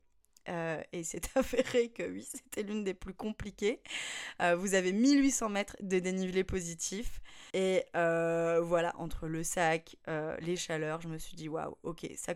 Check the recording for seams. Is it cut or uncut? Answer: cut